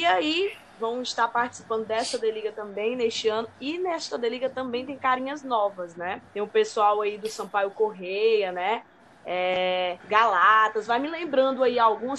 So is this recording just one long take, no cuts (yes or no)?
no